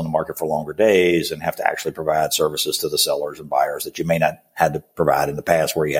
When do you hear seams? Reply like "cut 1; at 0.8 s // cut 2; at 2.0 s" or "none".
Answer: none